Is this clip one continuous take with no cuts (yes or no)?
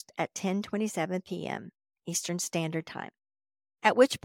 yes